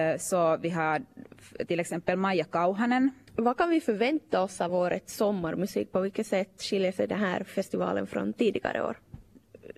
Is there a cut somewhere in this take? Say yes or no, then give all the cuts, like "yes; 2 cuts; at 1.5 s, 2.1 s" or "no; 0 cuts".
no; 0 cuts